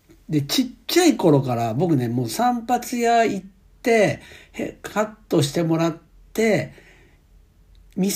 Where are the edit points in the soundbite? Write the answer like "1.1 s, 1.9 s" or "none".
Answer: none